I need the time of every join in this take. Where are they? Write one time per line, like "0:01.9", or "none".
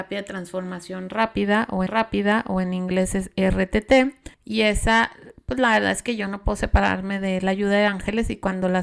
0:01.9
0:04.3